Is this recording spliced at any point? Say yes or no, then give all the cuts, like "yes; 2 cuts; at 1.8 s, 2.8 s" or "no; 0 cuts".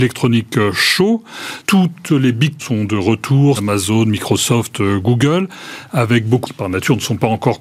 yes; 4 cuts; at 1.6 s, 2.6 s, 3.6 s, 6.4 s